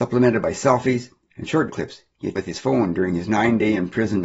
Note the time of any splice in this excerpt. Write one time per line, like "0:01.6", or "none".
0:01.7
0:02.4